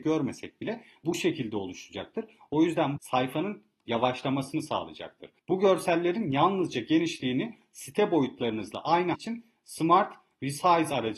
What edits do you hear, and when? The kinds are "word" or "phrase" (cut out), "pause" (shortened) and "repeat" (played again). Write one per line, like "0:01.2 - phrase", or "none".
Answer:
0:01.0 - word
0:03.0 - phrase
0:05.4 - pause
0:09.1 - phrase